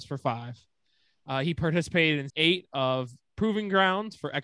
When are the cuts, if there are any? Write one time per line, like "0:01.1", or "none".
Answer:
0:02.3

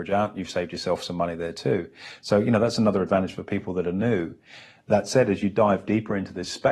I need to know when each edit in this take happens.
none

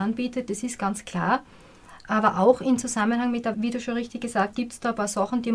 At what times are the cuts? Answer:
0:03.5
0:04.5

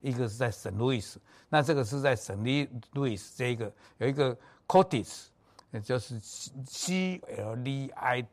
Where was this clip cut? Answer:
0:07.2

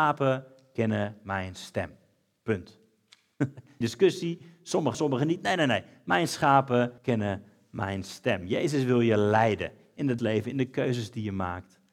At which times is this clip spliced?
0:03.8
0:04.9
0:07.0
0:10.2

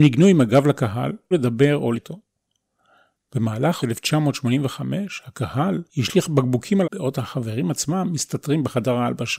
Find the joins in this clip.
0:01.3
0:01.9
0:03.8
0:05.9
0:06.8

